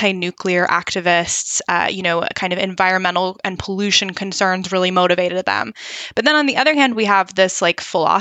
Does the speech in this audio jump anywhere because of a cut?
no; 0 cuts

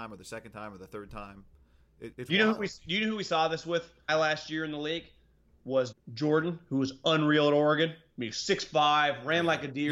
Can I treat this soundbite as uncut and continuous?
no; 3 cuts; at 2.1 s, 4.1 s, 5.9 s

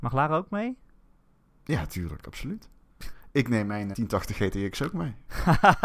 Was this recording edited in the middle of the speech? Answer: yes; 1 cut; at 3.9 s

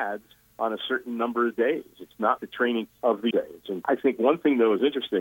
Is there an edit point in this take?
yes; 4 cuts; at 2.4 s, 2.9 s, 3.3 s, 3.8 s

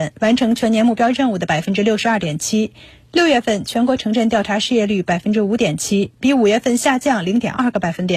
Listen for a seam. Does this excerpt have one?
no; 0 cuts

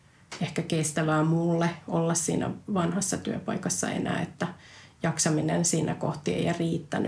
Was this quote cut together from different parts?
no; 0 cuts

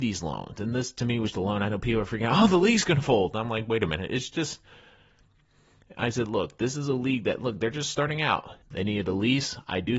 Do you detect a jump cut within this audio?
yes; 2 cuts; at 1.3 s, 8.6 s

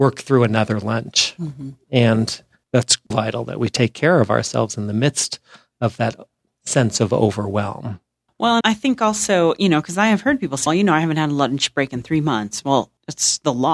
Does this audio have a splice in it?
yes; 3 cuts; at 3.1 s, 8.6 s, 10.7 s

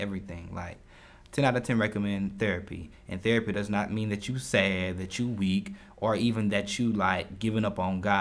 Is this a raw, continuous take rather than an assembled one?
yes; 0 cuts

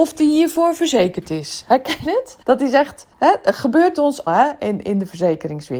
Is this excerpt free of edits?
no; 4 cuts; at 2.1 s, 2.4 s, 3.1 s, 4.3 s

